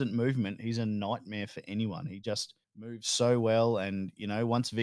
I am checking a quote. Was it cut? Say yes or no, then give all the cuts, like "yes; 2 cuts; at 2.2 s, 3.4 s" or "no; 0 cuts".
yes; 1 cut; at 2.6 s